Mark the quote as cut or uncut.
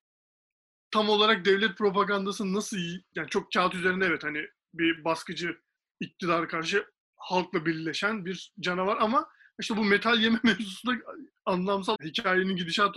cut